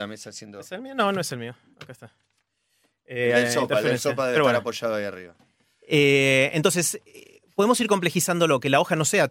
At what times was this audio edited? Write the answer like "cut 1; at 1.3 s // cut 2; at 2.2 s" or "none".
none